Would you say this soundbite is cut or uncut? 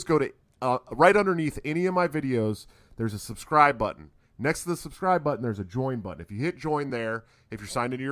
uncut